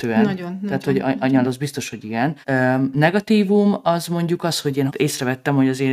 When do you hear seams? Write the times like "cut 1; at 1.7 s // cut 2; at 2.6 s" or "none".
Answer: cut 1; at 1.4 s // cut 2; at 2.4 s // cut 3; at 4.9 s